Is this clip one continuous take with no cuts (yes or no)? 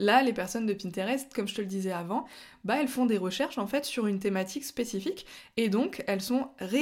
yes